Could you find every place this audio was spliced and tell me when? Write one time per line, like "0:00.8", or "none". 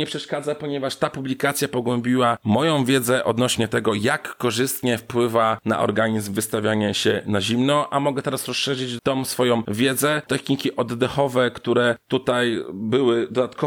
0:09.0
0:10.3